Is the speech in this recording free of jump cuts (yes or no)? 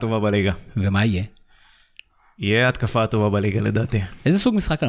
yes